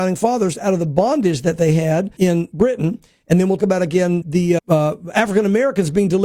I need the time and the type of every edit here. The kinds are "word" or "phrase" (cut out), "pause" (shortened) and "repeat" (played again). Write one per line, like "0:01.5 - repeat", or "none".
0:02.2 - word
0:03.6 - word
0:04.2 - word
0:04.6 - word